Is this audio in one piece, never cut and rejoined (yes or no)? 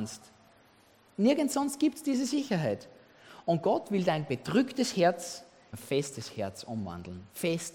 no